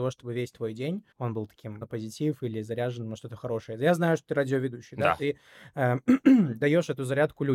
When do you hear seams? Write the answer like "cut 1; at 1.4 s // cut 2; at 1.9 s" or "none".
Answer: cut 1; at 1.1 s // cut 2; at 1.8 s